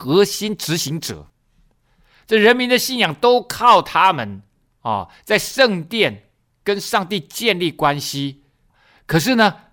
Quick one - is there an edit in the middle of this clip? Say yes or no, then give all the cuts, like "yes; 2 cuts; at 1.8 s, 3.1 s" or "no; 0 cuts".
no; 0 cuts